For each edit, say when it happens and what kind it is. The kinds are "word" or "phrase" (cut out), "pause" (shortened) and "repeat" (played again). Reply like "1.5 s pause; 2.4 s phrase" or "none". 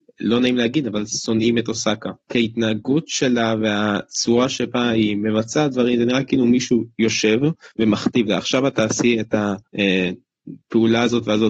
2.2 s pause; 7.7 s pause; 9.7 s pause; 10.6 s pause